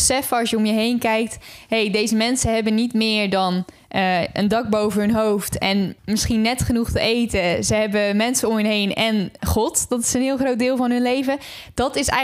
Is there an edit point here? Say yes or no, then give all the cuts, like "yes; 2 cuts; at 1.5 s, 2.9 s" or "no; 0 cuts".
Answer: yes; 1 cut; at 6.0 s